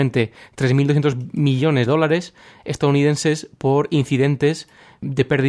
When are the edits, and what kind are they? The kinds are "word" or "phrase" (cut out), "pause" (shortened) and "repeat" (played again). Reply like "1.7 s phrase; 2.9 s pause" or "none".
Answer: 1.9 s word